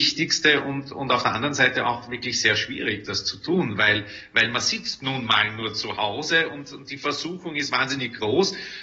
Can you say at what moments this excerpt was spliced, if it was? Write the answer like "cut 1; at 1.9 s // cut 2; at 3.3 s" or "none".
none

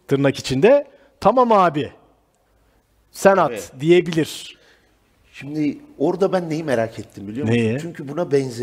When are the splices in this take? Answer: none

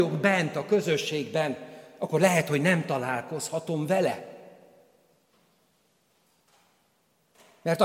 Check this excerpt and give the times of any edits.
none

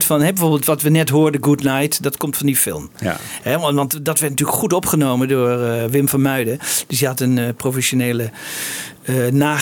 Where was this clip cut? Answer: none

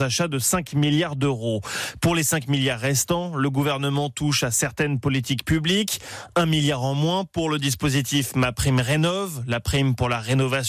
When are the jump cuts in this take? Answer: none

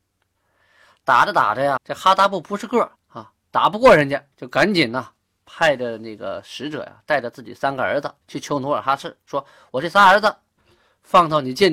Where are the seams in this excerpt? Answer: cut 1; at 1.8 s // cut 2; at 3.0 s // cut 3; at 4.3 s // cut 4; at 8.2 s

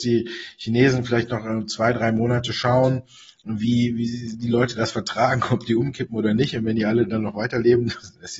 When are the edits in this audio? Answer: none

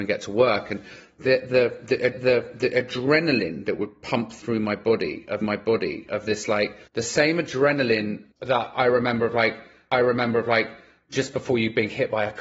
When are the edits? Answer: cut 1; at 2.1 s // cut 2; at 5.4 s // cut 3; at 6.9 s // cut 4; at 8.3 s // cut 5; at 9.9 s

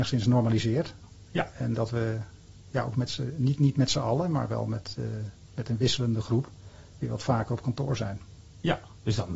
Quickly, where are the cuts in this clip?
cut 1; at 2.7 s

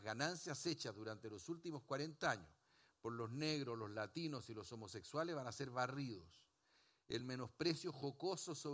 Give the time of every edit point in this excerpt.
none

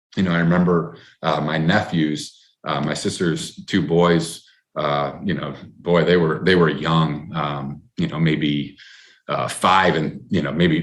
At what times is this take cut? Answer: none

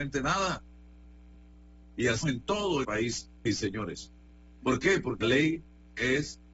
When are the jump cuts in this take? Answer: cut 1; at 2.2 s // cut 2; at 2.8 s // cut 3; at 3.5 s // cut 4; at 5.2 s

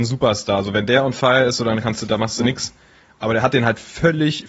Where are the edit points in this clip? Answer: none

